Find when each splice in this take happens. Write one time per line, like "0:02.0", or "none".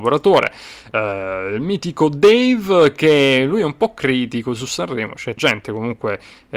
0:05.4